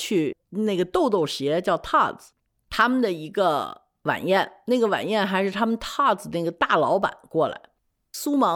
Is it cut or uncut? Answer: uncut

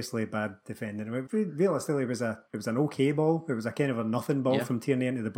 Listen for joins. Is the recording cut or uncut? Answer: cut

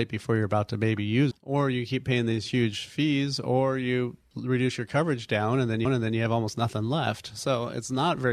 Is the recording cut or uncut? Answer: cut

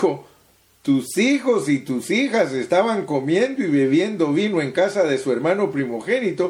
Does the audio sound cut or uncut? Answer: uncut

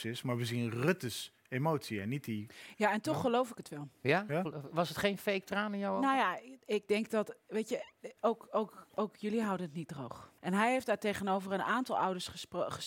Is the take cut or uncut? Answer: cut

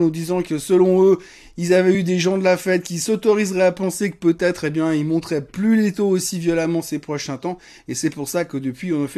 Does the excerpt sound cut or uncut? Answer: uncut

